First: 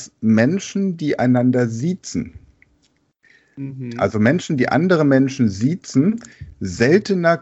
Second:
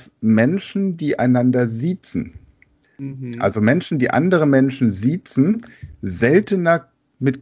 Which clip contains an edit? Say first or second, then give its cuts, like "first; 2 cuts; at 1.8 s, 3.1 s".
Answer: second; 1 cut; at 2.8 s